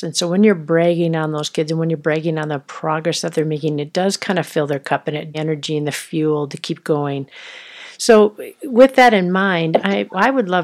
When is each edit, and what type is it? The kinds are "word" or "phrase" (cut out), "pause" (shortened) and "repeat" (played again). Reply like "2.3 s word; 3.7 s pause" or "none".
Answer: 5.3 s phrase